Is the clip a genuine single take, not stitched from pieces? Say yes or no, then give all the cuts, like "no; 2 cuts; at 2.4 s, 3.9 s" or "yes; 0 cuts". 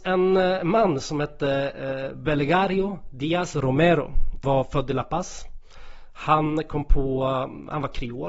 no; 1 cut; at 4.4 s